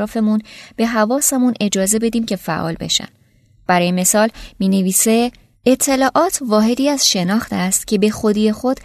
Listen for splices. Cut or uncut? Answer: uncut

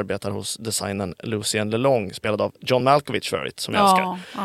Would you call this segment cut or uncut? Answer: uncut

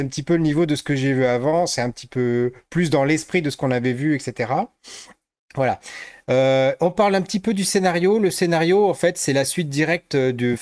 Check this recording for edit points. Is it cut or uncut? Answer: uncut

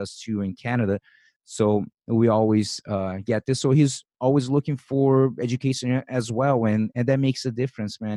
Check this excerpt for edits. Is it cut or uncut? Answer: uncut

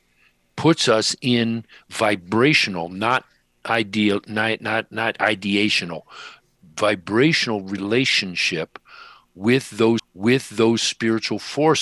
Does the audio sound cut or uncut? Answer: cut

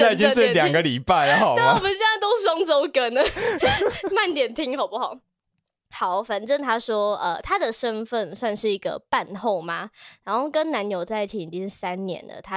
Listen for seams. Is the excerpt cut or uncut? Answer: uncut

